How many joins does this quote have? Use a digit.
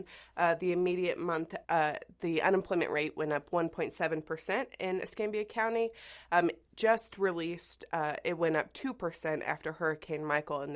1